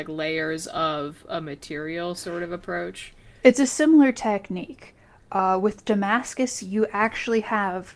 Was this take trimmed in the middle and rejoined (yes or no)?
no